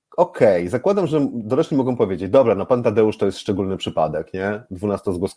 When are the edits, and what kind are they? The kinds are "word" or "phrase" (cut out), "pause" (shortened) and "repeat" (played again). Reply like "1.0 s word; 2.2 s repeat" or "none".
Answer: none